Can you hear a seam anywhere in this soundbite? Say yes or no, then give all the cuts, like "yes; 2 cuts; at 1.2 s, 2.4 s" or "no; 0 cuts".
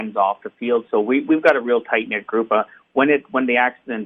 no; 0 cuts